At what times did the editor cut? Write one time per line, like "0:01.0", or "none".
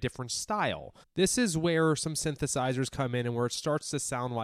0:01.0